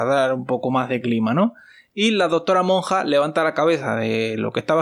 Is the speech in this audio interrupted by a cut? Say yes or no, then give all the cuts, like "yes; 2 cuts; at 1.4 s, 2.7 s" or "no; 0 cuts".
no; 0 cuts